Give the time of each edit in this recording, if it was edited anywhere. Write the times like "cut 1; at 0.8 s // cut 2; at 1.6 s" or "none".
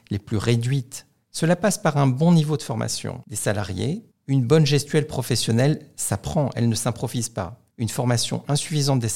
cut 1; at 7.7 s